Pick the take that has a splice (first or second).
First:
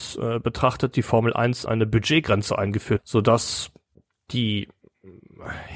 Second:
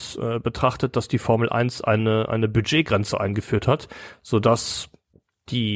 first